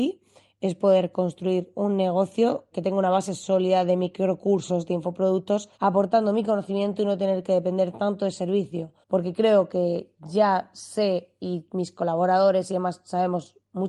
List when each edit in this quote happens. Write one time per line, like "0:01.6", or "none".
0:02.7
0:05.7
0:09.0